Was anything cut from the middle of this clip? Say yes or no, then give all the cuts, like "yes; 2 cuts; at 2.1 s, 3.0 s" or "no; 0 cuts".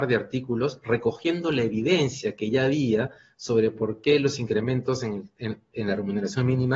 no; 0 cuts